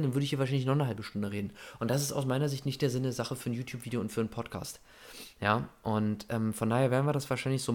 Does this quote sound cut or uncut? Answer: uncut